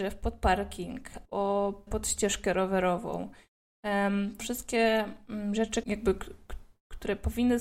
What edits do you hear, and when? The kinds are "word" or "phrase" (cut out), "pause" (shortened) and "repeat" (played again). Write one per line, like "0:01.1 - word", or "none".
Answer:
0:01.2 - word
0:01.9 - word
0:04.4 - word
0:05.8 - word